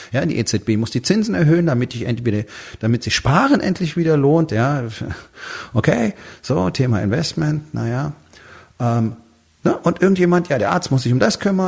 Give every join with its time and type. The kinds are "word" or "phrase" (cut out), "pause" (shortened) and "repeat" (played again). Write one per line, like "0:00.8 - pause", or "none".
none

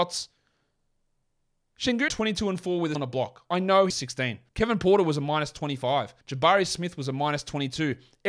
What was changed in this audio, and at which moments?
0:02.1 - word
0:02.9 - word
0:03.9 - phrase
0:04.5 - pause
0:06.2 - pause

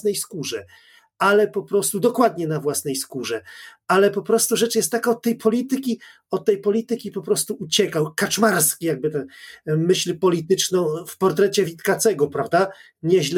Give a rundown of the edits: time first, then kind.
none

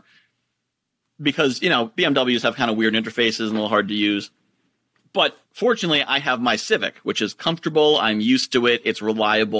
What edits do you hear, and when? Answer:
0:05.4 - pause

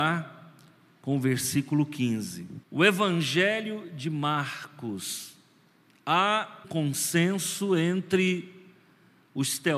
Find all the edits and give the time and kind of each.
0:02.6 - pause
0:06.6 - word

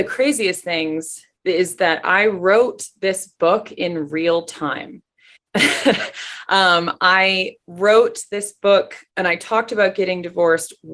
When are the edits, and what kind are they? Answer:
0:01.3 - pause
0:05.4 - pause
0:07.6 - pause
0:09.1 - pause

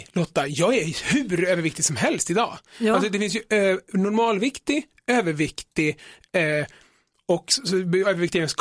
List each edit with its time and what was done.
none

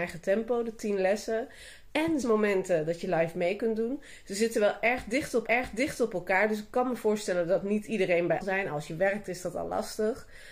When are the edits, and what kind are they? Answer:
0:02.2 - word
0:05.5 - repeat
0:08.4 - phrase

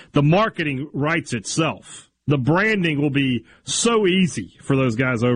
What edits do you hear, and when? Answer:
0:02.2 - pause

